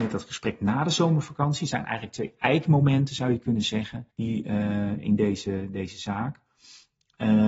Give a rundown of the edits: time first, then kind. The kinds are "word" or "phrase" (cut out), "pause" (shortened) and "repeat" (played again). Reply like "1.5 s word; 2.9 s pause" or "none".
4.1 s pause